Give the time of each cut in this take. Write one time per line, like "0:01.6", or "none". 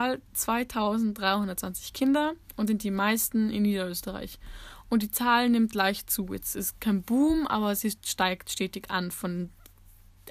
0:02.7
0:06.8